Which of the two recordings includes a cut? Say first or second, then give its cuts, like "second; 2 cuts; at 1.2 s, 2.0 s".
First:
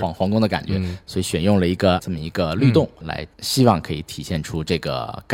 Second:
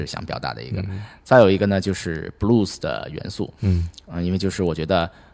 first; 3 cuts; at 2.0 s, 3.0 s, 3.3 s